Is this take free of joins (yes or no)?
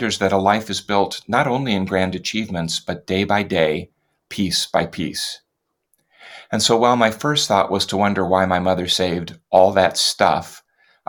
yes